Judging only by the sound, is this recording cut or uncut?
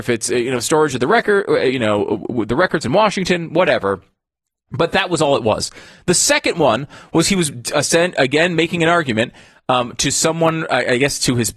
uncut